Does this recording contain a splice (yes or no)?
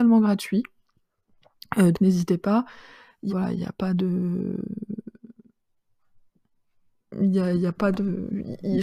yes